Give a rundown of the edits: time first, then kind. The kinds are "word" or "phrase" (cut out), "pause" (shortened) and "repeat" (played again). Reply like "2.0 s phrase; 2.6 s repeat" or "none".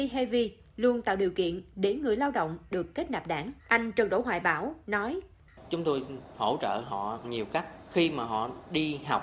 3.6 s pause; 7.2 s word